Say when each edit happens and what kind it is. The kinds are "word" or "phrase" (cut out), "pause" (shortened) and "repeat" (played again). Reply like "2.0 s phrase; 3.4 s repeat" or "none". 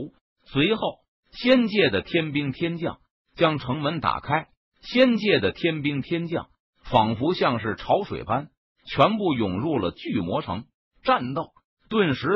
none

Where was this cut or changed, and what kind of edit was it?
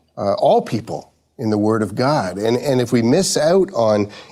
none

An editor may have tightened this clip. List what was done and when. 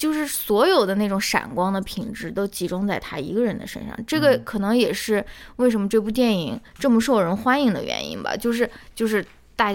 6.7 s pause

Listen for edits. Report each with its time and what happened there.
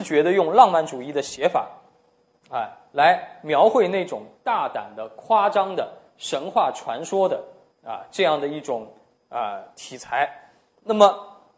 none

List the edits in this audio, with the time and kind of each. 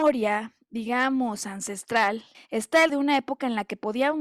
2.3 s pause; 2.9 s word

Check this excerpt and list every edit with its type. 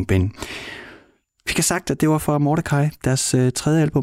none

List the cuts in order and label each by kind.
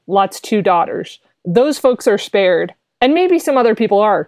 none

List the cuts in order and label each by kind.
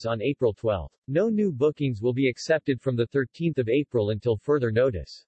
1.0 s pause

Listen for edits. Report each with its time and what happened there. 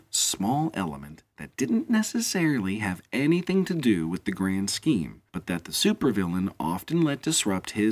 5.3 s pause

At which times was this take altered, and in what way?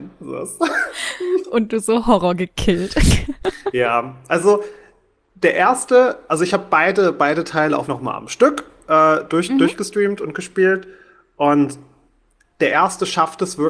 7.9 s word

